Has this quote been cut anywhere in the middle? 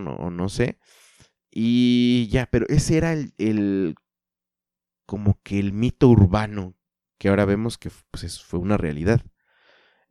no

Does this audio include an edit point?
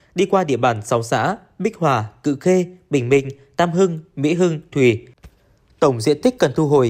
yes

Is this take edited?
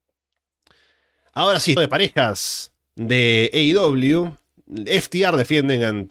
yes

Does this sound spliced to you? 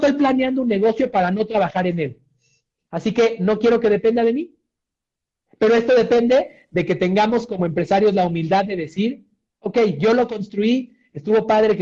no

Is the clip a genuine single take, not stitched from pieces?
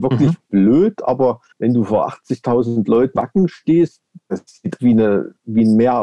no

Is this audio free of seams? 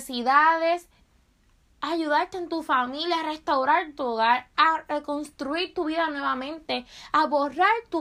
yes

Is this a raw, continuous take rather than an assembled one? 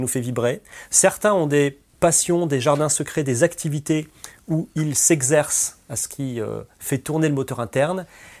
yes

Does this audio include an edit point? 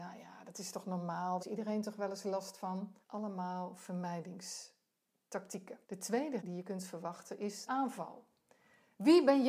yes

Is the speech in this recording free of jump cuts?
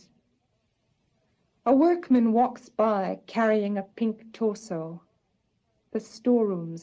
yes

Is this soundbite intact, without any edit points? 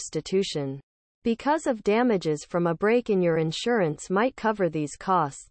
yes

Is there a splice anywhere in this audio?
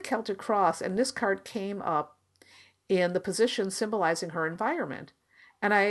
no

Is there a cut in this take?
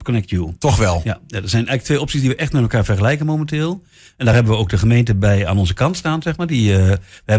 no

